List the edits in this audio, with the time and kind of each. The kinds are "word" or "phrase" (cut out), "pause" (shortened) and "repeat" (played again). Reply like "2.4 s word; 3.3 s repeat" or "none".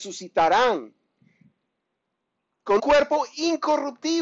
2.8 s word